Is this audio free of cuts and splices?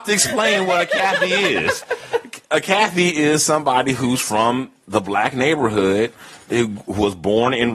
yes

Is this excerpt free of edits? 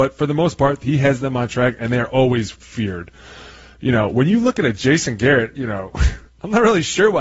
yes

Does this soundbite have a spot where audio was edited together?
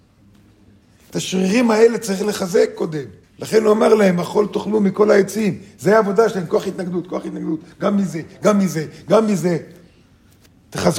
yes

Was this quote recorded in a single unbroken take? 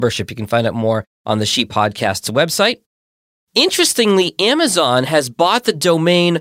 yes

